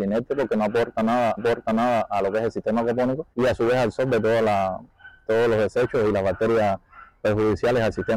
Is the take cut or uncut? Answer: cut